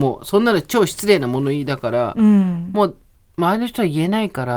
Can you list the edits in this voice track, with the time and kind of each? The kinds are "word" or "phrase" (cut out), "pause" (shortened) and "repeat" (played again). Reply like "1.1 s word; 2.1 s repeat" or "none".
none